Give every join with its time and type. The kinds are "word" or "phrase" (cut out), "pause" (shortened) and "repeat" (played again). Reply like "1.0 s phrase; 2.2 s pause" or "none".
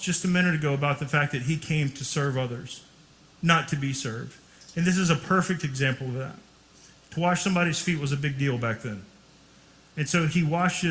none